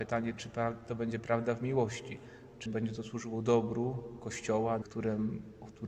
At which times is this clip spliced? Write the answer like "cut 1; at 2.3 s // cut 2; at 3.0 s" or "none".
cut 1; at 2.7 s // cut 2; at 4.8 s